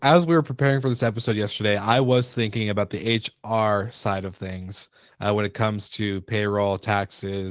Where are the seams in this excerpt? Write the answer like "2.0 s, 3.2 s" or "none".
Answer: none